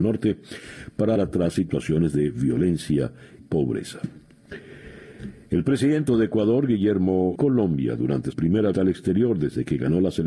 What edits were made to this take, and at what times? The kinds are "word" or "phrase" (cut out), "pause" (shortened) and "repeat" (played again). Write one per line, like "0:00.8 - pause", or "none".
0:01.2 - word
0:03.4 - word
0:06.1 - word
0:07.3 - phrase
0:08.3 - word
0:08.7 - word